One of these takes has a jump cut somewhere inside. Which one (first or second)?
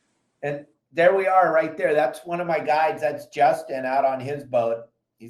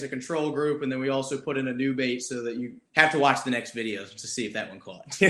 second